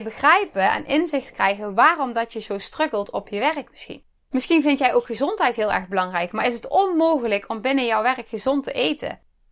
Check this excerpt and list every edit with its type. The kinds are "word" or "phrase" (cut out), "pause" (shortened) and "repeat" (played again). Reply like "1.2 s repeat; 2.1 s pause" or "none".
4.2 s pause